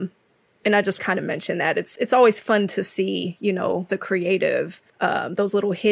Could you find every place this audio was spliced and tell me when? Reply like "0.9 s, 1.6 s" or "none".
1.0 s, 2.0 s, 3.9 s, 4.9 s